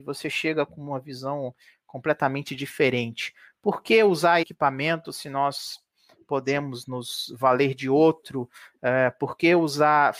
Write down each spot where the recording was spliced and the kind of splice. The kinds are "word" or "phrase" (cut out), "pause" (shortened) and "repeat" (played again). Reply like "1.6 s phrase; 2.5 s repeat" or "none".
4.4 s word